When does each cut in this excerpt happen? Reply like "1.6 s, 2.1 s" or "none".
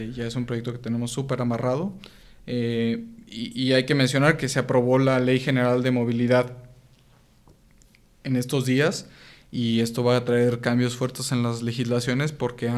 none